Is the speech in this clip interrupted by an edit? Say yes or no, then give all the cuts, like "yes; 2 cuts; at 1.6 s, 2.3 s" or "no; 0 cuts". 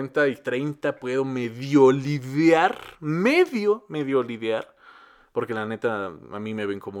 no; 0 cuts